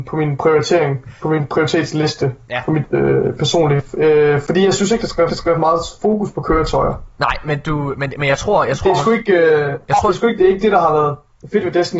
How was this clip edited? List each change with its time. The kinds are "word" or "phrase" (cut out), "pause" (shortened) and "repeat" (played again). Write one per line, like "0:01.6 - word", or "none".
0:05.3 - repeat
0:10.4 - word